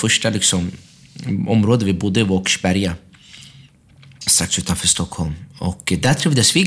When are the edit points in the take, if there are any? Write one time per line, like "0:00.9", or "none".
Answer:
none